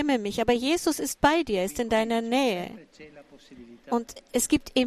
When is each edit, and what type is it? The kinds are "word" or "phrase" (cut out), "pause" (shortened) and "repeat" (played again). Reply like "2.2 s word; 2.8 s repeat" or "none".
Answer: none